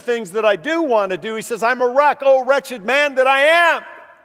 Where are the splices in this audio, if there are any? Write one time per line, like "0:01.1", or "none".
none

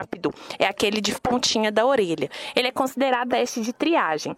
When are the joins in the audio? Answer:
0:01.1
0:03.3

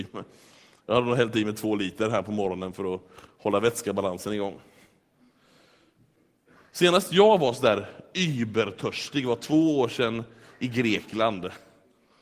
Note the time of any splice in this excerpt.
none

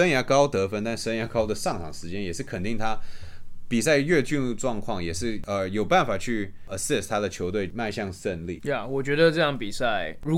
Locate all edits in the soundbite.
none

